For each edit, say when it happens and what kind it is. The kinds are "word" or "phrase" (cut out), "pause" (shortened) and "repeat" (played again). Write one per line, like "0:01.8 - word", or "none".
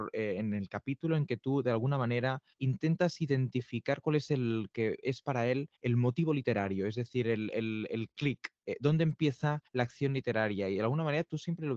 0:02.5 - pause
0:05.8 - pause
0:09.7 - pause

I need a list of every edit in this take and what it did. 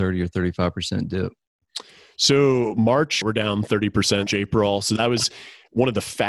0:03.2 - word
0:04.3 - word

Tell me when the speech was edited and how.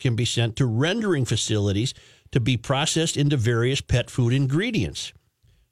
none

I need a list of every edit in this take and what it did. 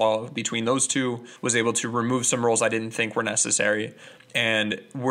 0:01.4 - pause

